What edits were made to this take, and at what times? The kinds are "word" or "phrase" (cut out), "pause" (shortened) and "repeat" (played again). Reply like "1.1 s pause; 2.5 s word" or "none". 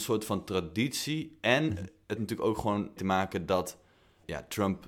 2.2 s word; 3.0 s word